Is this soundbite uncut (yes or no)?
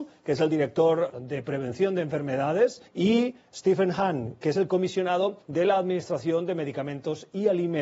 no